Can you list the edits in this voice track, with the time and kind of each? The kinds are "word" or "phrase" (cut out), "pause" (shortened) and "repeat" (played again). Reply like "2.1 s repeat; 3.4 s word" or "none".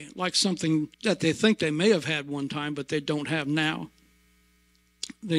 0.9 s pause